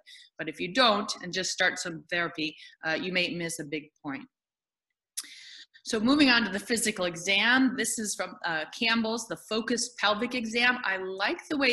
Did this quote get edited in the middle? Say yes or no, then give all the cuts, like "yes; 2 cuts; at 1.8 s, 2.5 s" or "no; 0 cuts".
no; 0 cuts